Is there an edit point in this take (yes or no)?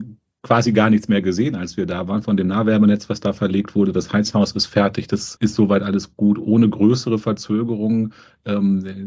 yes